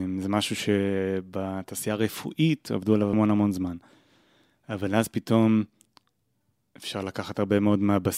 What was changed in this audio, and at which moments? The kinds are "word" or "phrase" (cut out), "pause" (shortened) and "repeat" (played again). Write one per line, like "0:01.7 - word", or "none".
0:03.1 - word